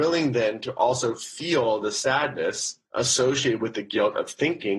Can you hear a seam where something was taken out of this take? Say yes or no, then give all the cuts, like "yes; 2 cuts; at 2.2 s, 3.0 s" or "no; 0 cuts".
no; 0 cuts